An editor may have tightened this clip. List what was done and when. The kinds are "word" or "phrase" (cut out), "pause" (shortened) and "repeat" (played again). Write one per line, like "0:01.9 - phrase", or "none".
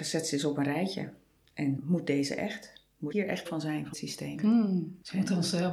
0:01.8 - word
0:03.1 - word
0:03.5 - word
0:03.9 - word